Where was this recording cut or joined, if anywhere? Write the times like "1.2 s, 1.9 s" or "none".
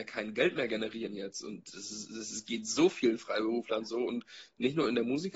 none